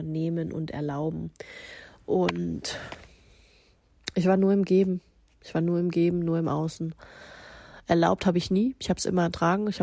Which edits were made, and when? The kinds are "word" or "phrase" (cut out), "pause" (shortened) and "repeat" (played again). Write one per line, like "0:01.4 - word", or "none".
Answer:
none